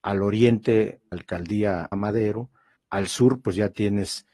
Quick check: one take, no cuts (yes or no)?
no